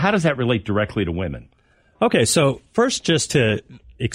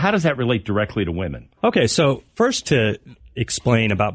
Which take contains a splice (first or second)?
second